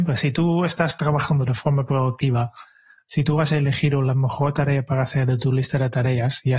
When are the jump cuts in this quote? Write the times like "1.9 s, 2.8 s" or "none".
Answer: none